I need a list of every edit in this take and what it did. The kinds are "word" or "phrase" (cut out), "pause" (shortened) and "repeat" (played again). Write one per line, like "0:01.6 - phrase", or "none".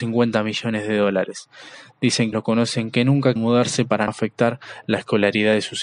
0:02.3 - word
0:03.4 - word
0:04.1 - word